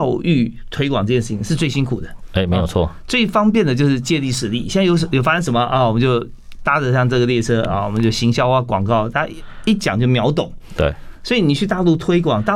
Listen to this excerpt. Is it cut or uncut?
uncut